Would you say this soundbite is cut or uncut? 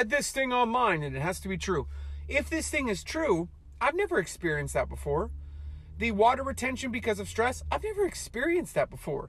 uncut